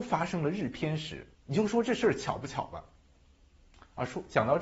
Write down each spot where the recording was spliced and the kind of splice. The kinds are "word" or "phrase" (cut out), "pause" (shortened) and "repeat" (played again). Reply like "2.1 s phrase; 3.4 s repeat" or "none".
1.3 s pause